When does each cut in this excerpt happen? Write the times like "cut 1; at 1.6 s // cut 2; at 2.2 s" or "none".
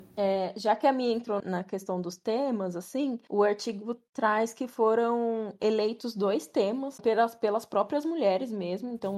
cut 1; at 1.4 s // cut 2; at 7.0 s